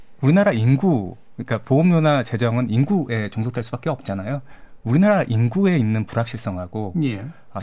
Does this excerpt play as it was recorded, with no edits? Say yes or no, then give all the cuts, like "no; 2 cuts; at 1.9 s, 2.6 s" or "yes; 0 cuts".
yes; 0 cuts